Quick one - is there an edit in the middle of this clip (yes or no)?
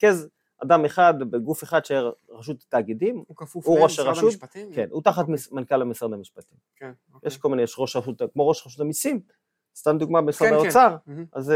no